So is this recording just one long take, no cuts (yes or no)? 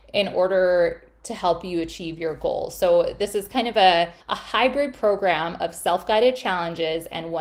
no